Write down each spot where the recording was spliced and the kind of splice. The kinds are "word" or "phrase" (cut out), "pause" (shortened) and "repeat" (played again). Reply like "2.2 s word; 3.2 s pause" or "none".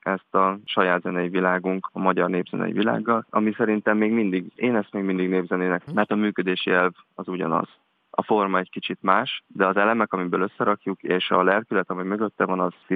5.9 s word